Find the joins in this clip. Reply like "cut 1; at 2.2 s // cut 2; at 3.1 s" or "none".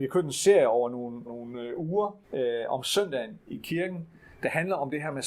cut 1; at 1.3 s // cut 2; at 2.2 s